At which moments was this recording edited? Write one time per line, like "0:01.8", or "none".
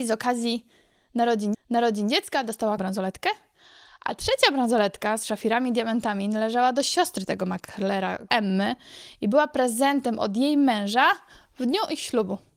0:01.5
0:02.8
0:08.3